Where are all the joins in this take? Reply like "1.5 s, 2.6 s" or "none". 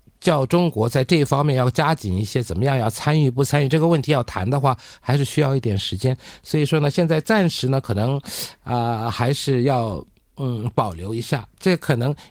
none